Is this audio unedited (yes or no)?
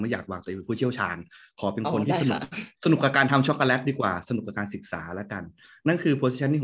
yes